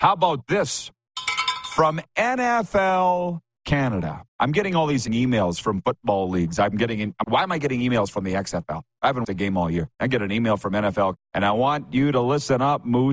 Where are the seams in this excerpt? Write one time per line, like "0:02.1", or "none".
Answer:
0:04.3
0:05.1
0:07.2
0:09.2
0:09.9
0:11.2

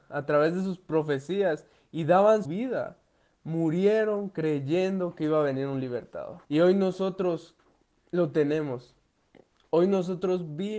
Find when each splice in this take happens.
0:02.4
0:06.4

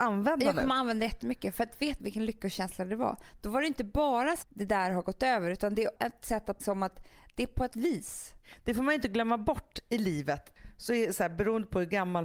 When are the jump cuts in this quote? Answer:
0:02.0
0:04.4
0:06.0
0:06.6
0:07.7

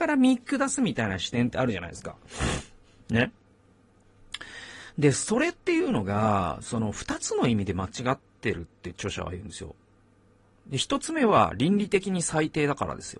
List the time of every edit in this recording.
none

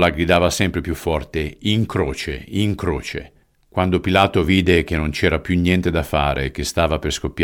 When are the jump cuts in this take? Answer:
0:03.4

